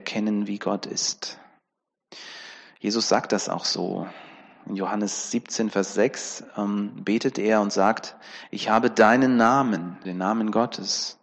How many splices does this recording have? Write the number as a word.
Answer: one